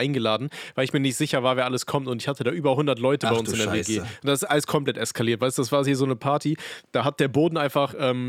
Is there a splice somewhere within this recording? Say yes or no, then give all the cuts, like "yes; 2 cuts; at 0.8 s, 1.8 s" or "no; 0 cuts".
no; 0 cuts